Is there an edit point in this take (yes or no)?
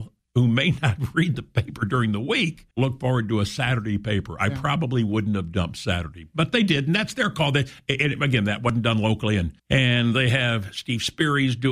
yes